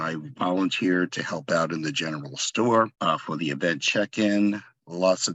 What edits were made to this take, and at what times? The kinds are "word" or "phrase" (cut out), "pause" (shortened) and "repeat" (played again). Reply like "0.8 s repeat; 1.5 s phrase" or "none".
2.9 s pause